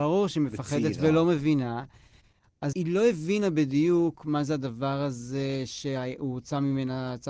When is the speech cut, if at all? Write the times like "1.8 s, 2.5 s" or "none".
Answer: 2.7 s